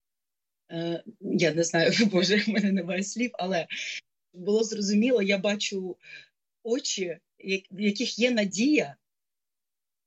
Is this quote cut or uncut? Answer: uncut